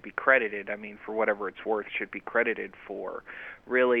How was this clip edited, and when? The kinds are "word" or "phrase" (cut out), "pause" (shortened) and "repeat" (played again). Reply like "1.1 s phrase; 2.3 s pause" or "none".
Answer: none